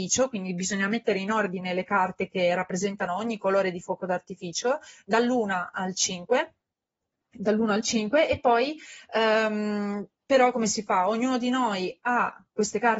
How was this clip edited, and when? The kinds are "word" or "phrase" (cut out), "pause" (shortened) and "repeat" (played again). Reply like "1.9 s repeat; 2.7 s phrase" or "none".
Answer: none

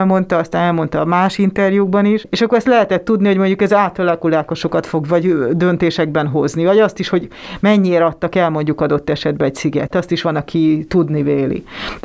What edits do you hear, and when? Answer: 9.9 s word

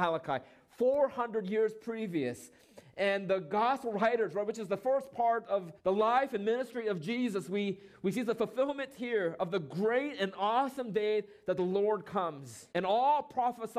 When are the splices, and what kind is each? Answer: 5.8 s pause; 12.7 s pause

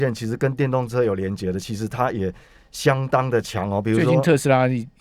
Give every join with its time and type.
none

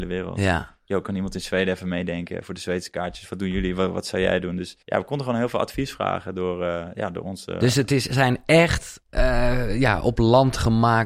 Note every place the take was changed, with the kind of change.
4.8 s pause

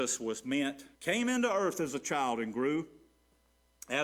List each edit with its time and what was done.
0.9 s pause

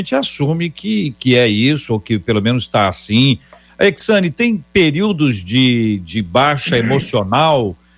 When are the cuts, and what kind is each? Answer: none

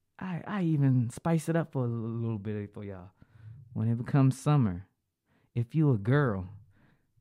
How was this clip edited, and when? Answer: none

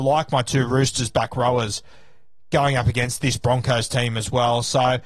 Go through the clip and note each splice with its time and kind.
none

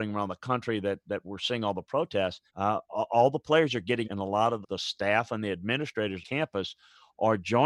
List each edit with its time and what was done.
2.5 s pause; 4.0 s word; 4.6 s word; 6.2 s word

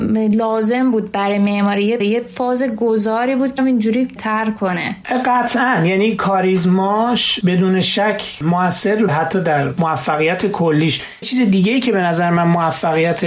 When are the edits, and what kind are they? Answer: 2.0 s repeat; 3.6 s word; 4.2 s phrase; 9.1 s word; 11.2 s word

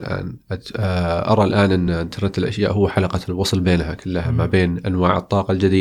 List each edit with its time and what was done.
none

